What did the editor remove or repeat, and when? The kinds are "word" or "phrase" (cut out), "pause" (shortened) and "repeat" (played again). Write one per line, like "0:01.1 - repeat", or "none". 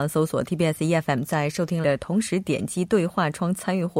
0:01.8 - phrase